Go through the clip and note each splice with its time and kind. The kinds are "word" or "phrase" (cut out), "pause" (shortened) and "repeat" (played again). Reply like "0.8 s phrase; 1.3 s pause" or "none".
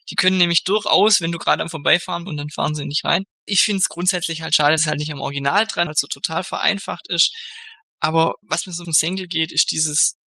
2.3 s phrase; 3.5 s word; 4.8 s word; 5.9 s phrase; 8.4 s pause; 8.8 s phrase